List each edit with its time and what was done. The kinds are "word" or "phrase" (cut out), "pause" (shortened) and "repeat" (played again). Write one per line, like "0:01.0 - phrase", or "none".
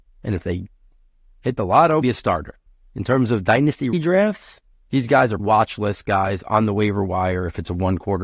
0:02.0 - word
0:02.7 - pause
0:03.9 - word
0:04.7 - pause
0:05.4 - word